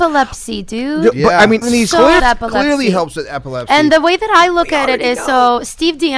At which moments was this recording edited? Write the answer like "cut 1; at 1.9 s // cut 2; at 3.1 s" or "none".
cut 1; at 1.6 s // cut 2; at 2.2 s

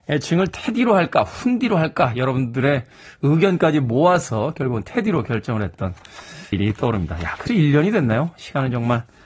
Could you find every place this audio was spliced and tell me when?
cut 1; at 6.5 s // cut 2; at 7.5 s

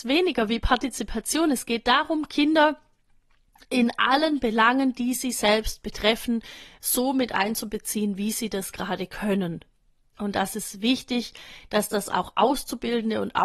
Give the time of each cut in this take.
none

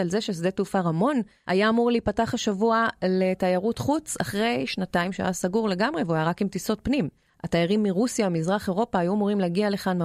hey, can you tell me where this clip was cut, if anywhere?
none

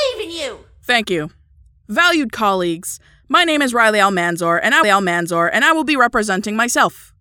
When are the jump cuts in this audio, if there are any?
cut 1; at 4.8 s

